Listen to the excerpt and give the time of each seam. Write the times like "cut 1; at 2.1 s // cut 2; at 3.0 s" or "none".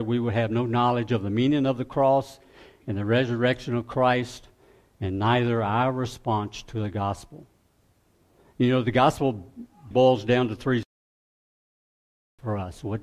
cut 1; at 9.9 s